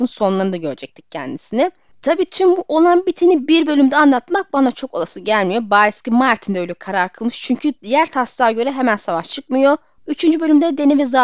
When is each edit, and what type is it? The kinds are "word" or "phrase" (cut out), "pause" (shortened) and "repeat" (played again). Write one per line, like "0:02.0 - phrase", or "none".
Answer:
none